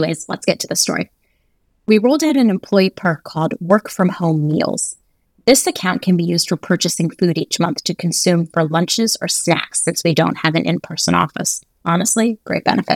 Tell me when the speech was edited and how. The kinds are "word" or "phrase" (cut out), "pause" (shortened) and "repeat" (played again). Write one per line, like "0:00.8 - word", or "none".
none

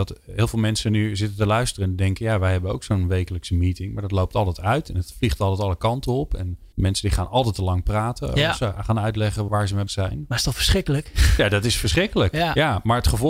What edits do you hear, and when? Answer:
0:06.7 - pause
0:09.5 - word
0:09.9 - word

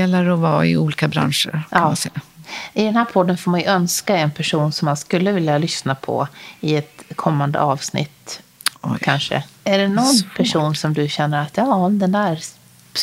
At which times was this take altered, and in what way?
0:09.5 - pause

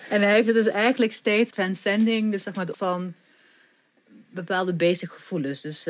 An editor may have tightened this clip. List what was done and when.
0:01.5 - phrase
0:02.7 - word

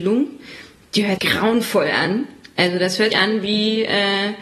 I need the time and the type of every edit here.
0:01.2 - word
0:03.1 - word

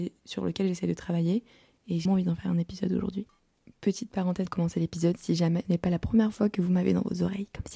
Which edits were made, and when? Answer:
0:02.1 - word
0:04.5 - word
0:05.6 - word

